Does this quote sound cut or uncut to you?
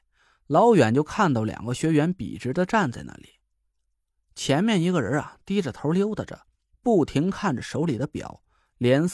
uncut